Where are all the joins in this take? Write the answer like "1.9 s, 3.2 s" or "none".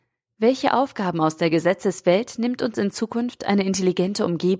none